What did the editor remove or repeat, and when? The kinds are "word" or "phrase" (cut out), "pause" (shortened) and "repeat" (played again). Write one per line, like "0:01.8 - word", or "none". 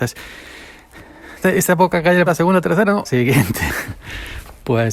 0:01.4 - word
0:02.3 - word
0:03.0 - word